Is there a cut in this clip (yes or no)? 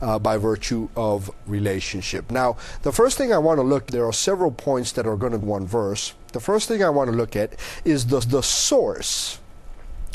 yes